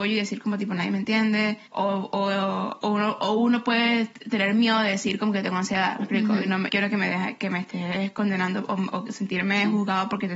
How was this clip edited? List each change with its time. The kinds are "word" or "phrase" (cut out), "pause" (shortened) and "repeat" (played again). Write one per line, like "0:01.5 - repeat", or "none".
0:01.7 - pause
0:06.7 - phrase